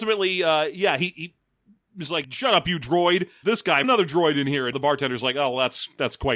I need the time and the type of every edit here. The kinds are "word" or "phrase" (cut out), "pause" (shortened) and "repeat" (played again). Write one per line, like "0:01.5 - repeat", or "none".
0:02.2 - word
0:03.4 - word
0:03.8 - word
0:04.7 - word